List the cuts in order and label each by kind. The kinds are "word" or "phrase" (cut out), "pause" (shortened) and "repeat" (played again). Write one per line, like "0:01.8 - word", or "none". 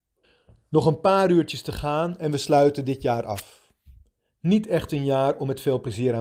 none